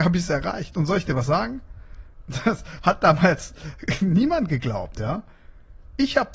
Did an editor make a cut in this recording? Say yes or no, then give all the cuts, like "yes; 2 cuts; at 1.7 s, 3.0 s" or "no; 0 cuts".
no; 0 cuts